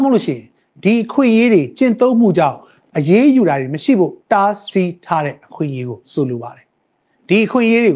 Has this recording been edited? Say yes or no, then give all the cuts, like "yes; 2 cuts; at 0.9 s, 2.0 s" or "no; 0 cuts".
yes; 2 cuts; at 4.2 s, 6.0 s